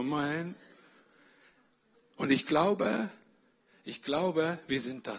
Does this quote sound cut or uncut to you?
uncut